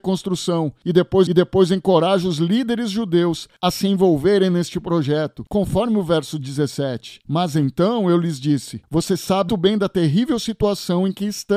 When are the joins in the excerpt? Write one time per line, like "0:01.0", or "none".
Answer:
0:01.3
0:09.5